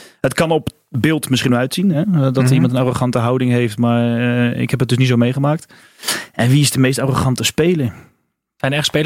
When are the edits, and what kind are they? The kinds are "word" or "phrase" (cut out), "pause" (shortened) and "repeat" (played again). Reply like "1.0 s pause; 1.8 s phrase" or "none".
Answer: none